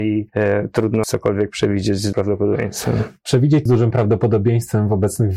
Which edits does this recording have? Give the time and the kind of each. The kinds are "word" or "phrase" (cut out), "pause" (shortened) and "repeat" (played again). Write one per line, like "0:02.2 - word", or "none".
0:01.0 - word
0:02.1 - word
0:03.7 - word